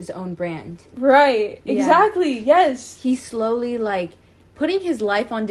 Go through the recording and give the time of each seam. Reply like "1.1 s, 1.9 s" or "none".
none